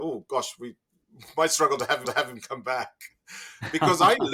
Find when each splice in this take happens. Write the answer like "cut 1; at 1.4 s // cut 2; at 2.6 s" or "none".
cut 1; at 2.0 s